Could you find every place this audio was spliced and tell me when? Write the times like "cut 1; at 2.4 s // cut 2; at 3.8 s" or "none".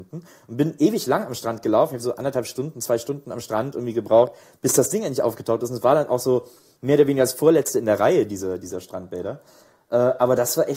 none